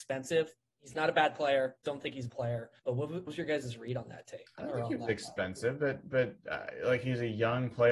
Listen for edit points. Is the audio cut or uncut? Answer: cut